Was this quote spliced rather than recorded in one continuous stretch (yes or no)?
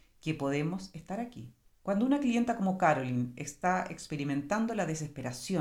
yes